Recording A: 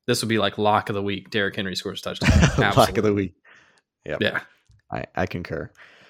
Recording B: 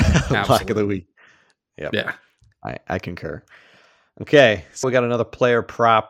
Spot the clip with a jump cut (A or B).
B